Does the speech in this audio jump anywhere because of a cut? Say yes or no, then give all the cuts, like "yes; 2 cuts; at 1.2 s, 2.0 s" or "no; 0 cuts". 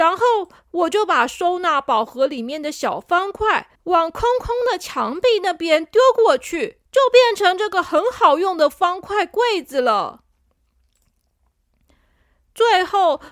yes; 2 cuts; at 3.8 s, 6.9 s